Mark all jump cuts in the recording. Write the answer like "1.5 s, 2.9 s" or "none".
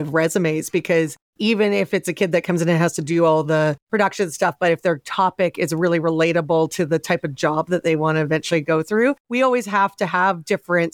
1.3 s, 3.8 s, 9.2 s